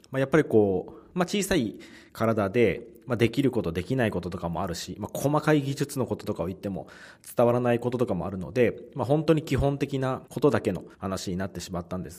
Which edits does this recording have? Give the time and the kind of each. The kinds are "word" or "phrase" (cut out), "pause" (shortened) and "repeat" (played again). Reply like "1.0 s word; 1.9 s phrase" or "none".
10.3 s pause; 10.9 s pause